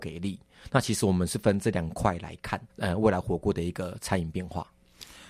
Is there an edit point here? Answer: yes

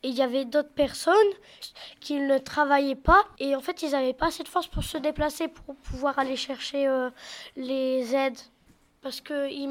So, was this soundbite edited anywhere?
no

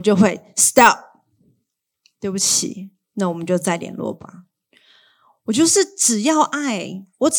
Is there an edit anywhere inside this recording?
no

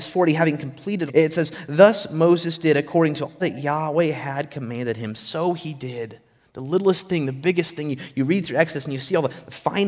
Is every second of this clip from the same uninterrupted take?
no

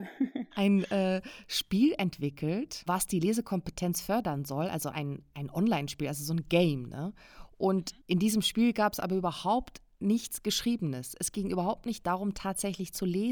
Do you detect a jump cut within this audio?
yes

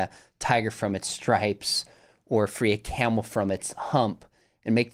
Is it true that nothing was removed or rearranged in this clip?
yes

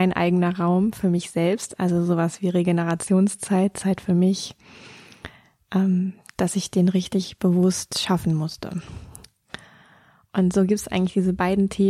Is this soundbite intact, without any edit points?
yes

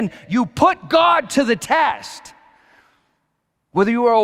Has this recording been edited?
no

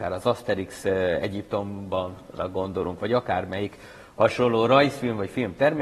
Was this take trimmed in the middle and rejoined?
no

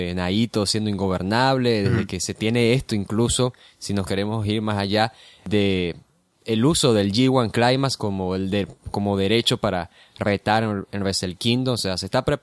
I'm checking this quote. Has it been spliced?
no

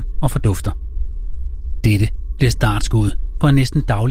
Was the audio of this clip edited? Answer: no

